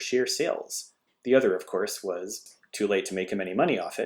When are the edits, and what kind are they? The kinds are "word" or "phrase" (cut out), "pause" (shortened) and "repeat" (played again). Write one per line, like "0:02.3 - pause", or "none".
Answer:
none